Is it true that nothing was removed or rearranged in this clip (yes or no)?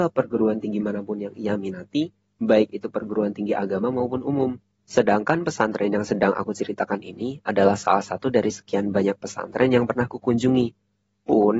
yes